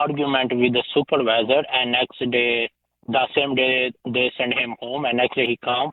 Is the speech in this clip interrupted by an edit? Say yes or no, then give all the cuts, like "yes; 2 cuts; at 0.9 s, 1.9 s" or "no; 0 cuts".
no; 0 cuts